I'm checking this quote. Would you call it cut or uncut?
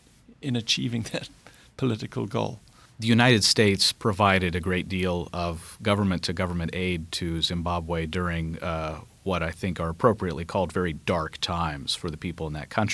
uncut